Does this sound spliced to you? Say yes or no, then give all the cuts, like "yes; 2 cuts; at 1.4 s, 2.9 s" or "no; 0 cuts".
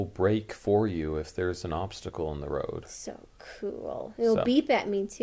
no; 0 cuts